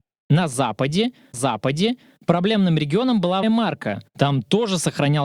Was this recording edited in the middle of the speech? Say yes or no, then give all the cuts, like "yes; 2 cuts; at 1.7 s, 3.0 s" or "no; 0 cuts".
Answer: yes; 2 cuts; at 1.3 s, 3.4 s